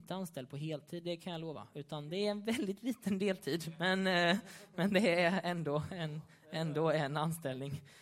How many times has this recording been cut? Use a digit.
0